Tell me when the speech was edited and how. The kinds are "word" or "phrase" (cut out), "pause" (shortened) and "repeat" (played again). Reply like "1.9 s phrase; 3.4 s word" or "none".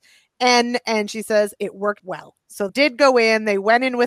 2.0 s word; 2.7 s word